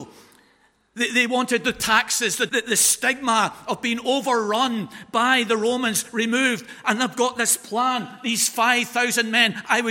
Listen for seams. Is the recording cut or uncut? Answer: cut